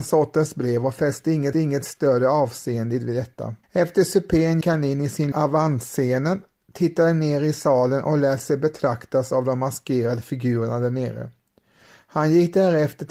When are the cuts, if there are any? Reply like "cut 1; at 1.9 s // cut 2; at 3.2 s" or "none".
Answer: cut 1; at 1.5 s // cut 2; at 3.6 s // cut 3; at 4.6 s // cut 4; at 5.3 s